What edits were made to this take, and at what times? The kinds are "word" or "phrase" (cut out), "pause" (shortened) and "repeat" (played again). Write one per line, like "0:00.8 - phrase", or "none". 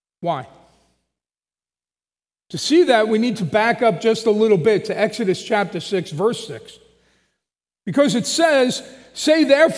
none